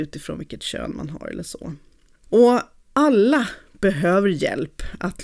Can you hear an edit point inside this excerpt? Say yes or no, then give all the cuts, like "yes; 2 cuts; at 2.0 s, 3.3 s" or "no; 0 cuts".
no; 0 cuts